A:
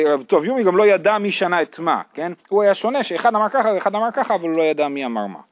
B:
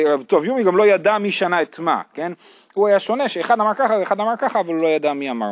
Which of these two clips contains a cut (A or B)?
A